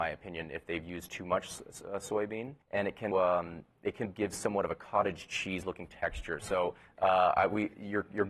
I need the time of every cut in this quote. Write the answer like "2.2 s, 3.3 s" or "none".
2.6 s, 3.1 s, 4.1 s